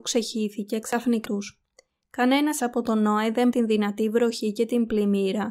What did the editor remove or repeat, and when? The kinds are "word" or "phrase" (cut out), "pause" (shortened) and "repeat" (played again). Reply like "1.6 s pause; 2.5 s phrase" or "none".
1.2 s word; 2.6 s word; 3.5 s word